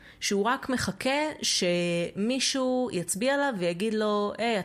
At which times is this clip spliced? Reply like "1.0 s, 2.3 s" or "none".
none